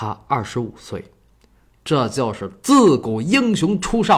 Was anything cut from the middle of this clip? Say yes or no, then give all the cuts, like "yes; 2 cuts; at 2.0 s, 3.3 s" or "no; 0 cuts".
no; 0 cuts